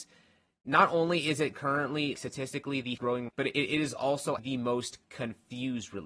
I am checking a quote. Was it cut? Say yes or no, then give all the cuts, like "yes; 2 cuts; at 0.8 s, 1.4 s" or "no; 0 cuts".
yes; 4 cuts; at 2.1 s, 3.0 s, 3.3 s, 4.4 s